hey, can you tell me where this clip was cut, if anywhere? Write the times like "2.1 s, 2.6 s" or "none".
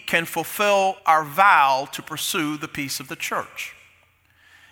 1.0 s